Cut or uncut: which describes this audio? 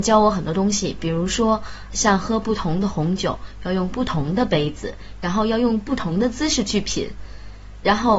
cut